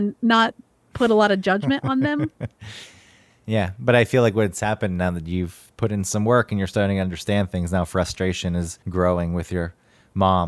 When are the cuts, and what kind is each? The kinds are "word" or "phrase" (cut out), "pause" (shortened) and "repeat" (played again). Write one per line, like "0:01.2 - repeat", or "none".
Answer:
0:08.8 - pause